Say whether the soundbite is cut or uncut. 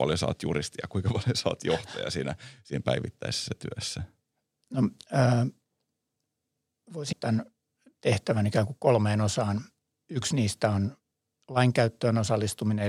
cut